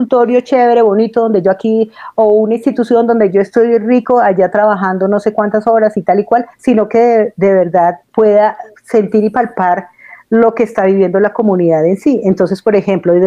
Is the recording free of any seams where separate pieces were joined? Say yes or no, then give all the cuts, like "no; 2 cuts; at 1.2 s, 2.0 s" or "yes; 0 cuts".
no; 1 cut; at 6.5 s